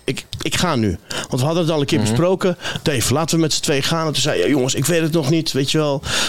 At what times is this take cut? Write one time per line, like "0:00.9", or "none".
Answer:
none